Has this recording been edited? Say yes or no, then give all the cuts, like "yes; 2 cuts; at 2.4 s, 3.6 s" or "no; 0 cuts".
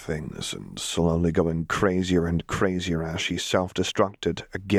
no; 0 cuts